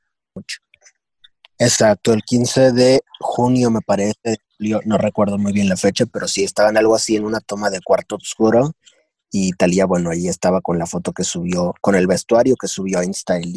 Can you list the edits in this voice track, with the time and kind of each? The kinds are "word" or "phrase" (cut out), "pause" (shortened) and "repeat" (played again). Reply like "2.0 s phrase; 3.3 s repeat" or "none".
none

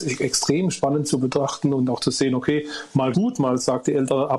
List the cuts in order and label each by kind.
3.1 s word

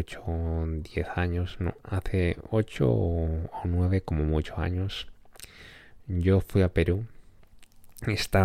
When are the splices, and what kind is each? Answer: none

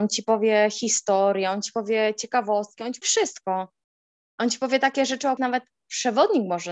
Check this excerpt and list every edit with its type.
3.0 s word; 5.4 s word

